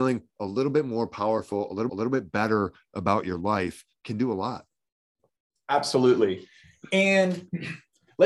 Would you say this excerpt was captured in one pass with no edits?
no; 1 cut; at 1.9 s

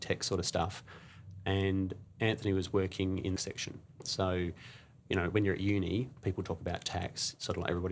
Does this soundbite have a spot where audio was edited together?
yes; 1 cut; at 3.4 s

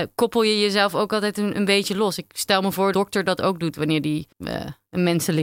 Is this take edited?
yes; 2 cuts; at 2.9 s, 4.3 s

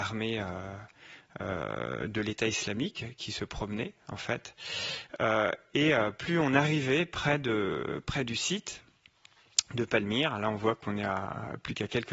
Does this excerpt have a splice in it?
no; 0 cuts

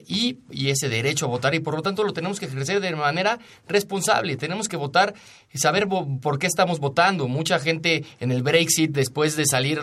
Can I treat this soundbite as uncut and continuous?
yes; 0 cuts

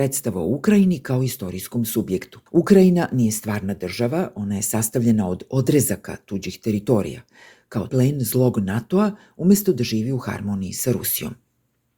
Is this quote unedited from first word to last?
no; 2 cuts; at 2.5 s, 7.9 s

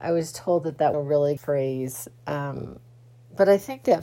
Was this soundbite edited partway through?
yes; 2 cuts; at 0.9 s, 1.4 s

